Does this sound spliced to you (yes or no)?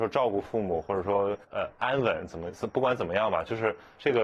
yes